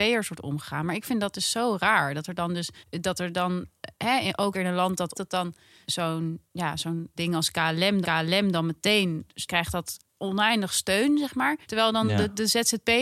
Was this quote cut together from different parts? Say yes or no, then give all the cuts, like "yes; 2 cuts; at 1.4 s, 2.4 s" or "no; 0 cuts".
yes; 8 cuts; at 2.8 s, 4.5 s, 5.1 s, 5.8 s, 7.2 s, 8.0 s, 9.5 s, 11.6 s